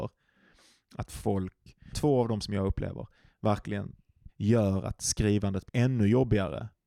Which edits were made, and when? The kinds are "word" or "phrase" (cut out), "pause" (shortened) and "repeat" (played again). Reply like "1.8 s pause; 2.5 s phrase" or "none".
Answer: 1.9 s word; 2.4 s word; 4.3 s word; 5.7 s word